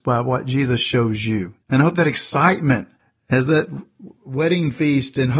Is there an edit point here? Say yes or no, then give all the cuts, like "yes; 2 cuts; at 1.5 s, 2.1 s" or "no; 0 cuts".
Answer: yes; 2 cuts; at 1.6 s, 3.0 s